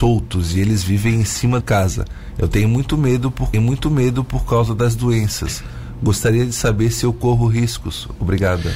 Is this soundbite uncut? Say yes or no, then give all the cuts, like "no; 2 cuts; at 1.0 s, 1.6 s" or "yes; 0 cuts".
no; 2 cuts; at 1.6 s, 3.5 s